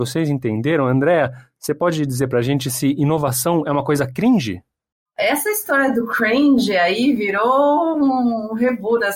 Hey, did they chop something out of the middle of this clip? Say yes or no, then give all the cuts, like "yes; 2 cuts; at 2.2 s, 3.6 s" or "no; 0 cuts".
no; 0 cuts